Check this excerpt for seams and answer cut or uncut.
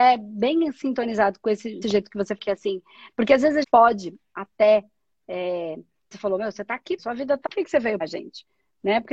cut